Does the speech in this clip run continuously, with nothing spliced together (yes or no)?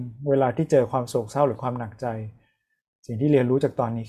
yes